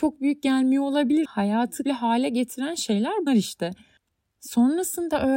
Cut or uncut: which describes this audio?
cut